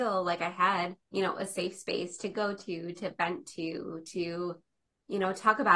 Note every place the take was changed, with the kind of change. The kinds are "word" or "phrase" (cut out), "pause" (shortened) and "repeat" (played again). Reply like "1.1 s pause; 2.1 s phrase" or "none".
1.0 s pause

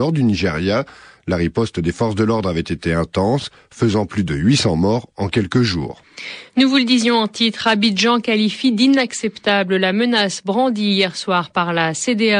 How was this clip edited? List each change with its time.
none

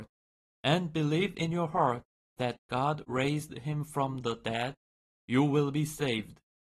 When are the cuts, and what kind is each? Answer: none

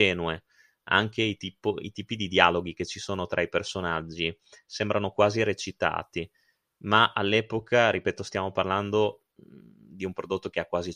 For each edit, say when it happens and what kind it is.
none

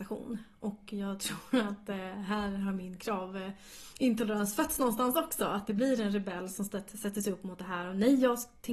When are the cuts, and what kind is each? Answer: none

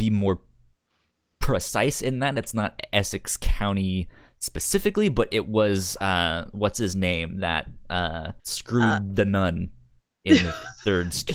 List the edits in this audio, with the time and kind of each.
8.4 s pause

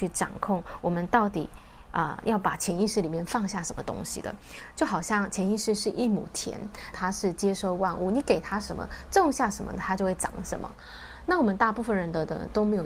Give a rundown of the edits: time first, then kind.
6.9 s phrase

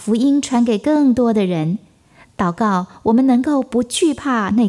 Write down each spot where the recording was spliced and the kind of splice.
none

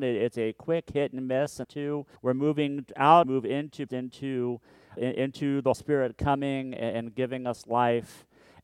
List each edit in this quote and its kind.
1.6 s word; 2.2 s pause; 3.2 s phrase; 3.9 s word; 5.0 s word; 5.7 s word

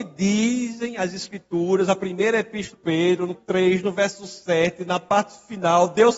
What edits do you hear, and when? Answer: 2.7 s word; 3.3 s word

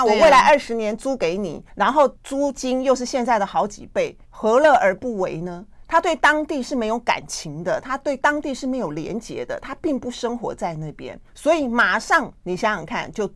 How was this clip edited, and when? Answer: 1.7 s pause; 2.2 s pause; 4.2 s pause; 11.3 s pause

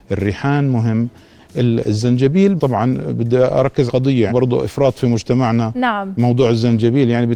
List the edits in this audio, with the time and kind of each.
2.6 s word; 3.9 s word; 4.3 s word

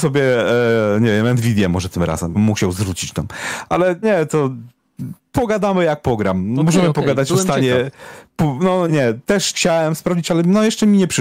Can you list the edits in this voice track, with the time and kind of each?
2.3 s word; 4.0 s word; 8.9 s word; 9.5 s word

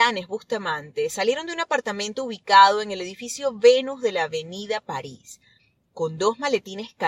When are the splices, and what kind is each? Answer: none

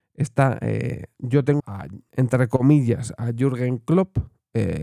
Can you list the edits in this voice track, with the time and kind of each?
1.6 s word; 2.1 s word

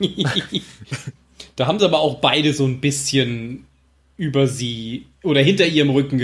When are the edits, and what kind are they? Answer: none

